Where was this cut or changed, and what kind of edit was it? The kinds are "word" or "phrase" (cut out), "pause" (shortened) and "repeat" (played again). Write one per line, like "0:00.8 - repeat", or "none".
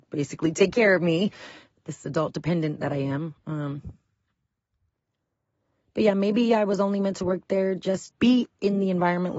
0:08.1 - word